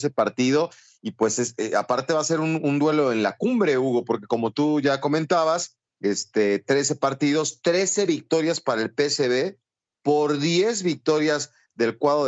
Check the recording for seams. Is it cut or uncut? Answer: uncut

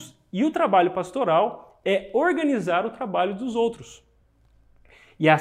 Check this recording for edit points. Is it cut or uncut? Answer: uncut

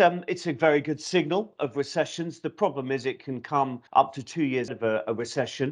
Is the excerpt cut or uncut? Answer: cut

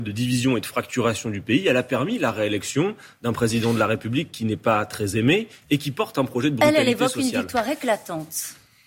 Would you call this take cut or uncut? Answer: uncut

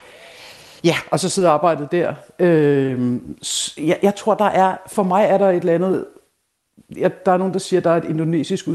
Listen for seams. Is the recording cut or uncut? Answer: uncut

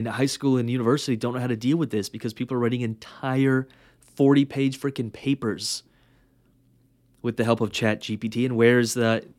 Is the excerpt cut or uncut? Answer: uncut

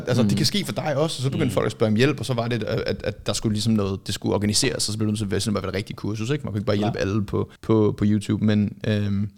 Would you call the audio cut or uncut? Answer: cut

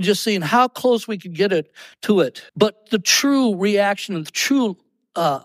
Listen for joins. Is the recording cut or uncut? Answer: cut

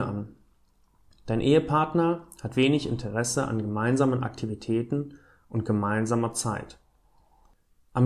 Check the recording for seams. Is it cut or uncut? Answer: uncut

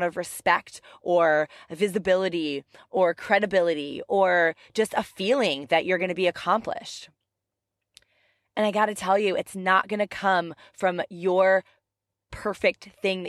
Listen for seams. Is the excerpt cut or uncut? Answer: uncut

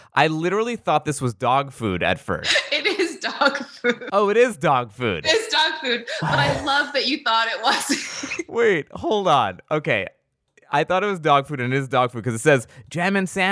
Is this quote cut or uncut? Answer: uncut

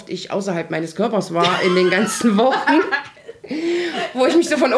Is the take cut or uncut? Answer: uncut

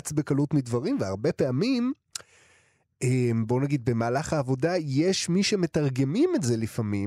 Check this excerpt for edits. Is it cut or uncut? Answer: uncut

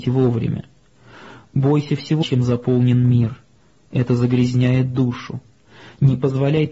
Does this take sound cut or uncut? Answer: cut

